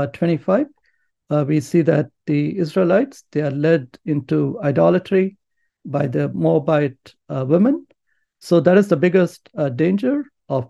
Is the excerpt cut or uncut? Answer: uncut